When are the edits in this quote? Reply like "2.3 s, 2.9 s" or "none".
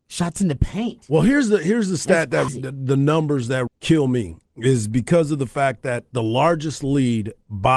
2.5 s, 3.7 s